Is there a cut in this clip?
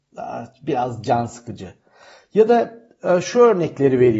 no; 0 cuts

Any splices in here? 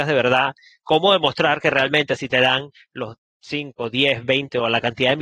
no; 0 cuts

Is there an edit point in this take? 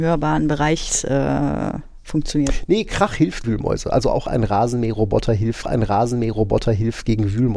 yes; 2 cuts; at 3.4 s, 5.6 s

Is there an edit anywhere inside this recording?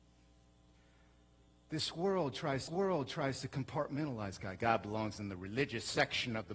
yes; 1 cut; at 2.7 s

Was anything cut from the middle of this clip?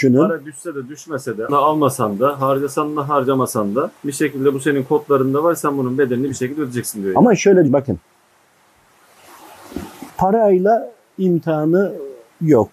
yes; 4 cuts; at 1.5 s, 4.0 s, 7.7 s, 10.1 s

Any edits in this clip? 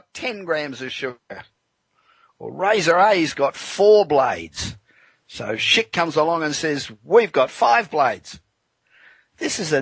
no; 0 cuts

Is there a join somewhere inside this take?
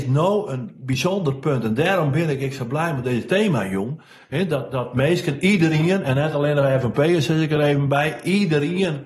no; 0 cuts

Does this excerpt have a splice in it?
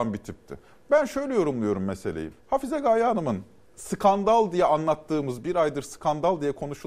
yes; 2 cuts; at 2.4 s, 3.7 s

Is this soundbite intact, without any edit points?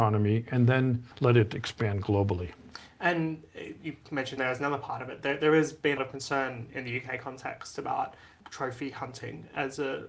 no; 4 cuts; at 1.1 s, 4.4 s, 6.0 s, 8.4 s

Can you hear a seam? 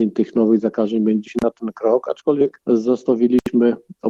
yes; 1 cut; at 1.3 s

